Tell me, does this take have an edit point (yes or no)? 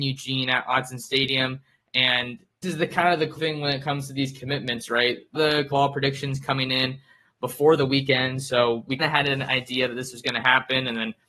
yes